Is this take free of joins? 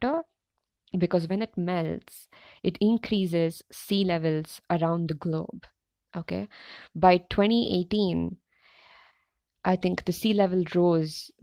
yes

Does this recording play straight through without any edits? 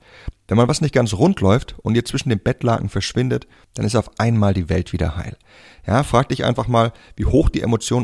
yes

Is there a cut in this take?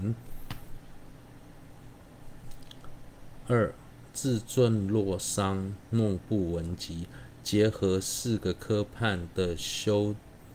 no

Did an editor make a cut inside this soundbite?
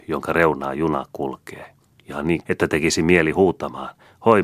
yes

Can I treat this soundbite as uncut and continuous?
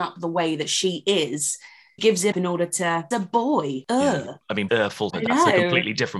no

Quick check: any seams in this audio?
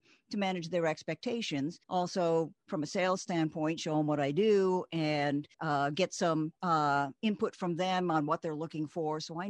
yes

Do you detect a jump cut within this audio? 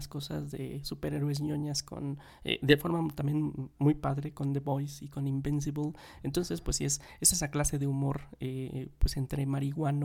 no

